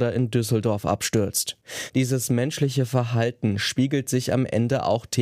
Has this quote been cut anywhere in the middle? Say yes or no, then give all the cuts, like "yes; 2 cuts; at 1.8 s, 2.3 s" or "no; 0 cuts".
no; 0 cuts